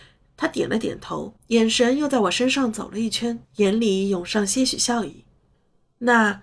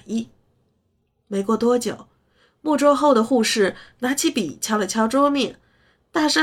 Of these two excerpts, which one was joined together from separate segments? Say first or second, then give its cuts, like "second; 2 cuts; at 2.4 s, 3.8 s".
first; 2 cuts; at 1.4 s, 3.4 s